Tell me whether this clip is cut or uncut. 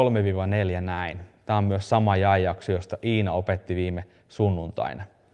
uncut